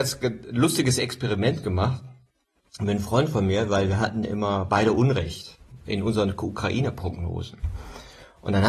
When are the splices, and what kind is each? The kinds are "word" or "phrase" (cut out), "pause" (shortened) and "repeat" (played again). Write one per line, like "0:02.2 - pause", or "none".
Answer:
none